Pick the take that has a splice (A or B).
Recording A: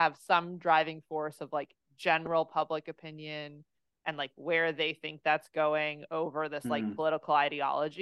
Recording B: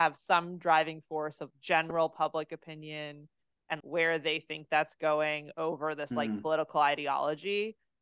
B